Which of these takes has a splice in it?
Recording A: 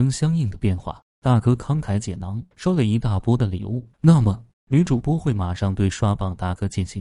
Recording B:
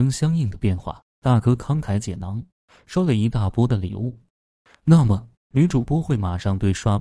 A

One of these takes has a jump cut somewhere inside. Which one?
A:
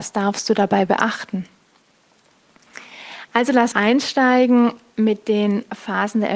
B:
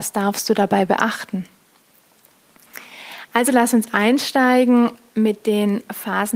A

